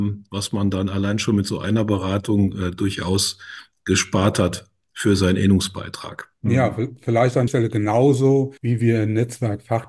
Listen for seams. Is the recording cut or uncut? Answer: cut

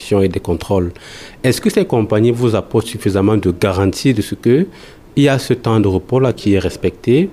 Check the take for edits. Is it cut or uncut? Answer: uncut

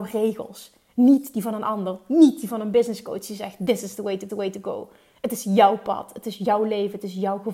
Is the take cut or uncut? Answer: cut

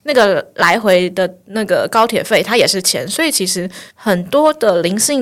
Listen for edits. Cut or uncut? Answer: cut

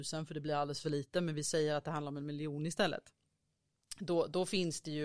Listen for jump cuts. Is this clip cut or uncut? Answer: uncut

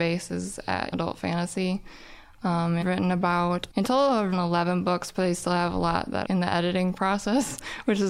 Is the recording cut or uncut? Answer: cut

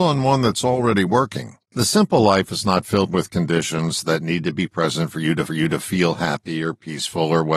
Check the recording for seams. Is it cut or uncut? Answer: cut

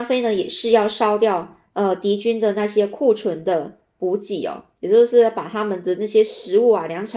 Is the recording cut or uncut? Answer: cut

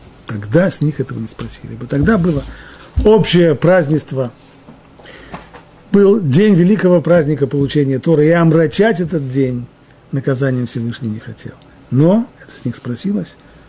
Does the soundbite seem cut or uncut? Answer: uncut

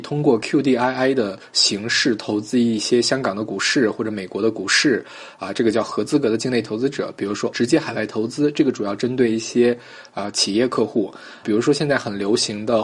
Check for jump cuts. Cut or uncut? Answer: cut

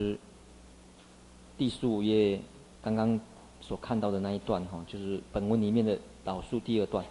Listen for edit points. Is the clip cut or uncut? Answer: cut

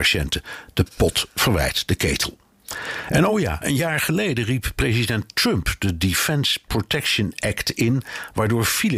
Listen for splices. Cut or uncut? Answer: uncut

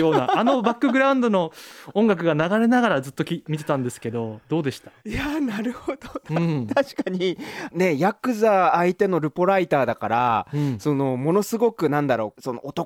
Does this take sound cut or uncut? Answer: cut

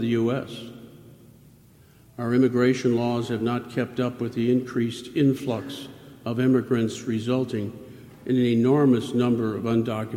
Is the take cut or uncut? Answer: uncut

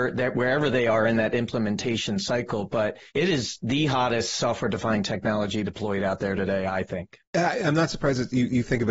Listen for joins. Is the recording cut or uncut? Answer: cut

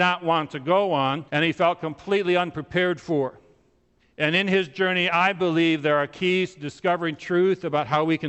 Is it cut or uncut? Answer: cut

